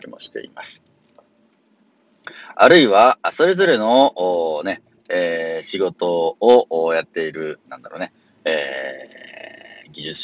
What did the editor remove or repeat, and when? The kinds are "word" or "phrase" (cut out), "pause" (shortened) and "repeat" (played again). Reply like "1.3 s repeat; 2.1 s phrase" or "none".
none